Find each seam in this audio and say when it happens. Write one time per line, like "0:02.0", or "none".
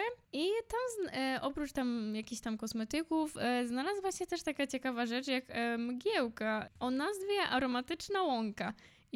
none